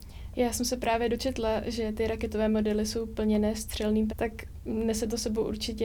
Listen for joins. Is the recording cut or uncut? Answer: cut